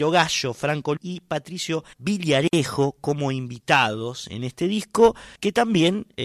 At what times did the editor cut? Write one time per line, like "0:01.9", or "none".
0:01.0
0:01.9
0:05.4